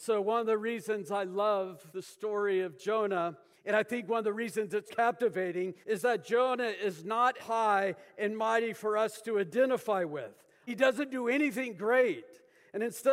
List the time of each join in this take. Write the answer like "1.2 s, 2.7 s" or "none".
1.9 s, 3.5 s, 4.9 s, 5.8 s, 7.4 s, 10.7 s